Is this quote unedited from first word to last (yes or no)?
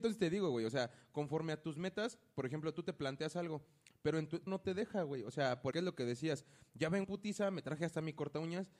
no